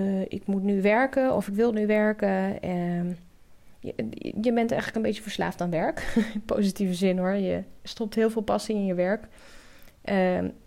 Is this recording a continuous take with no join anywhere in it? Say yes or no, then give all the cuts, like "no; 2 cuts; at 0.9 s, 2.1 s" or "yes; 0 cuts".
yes; 0 cuts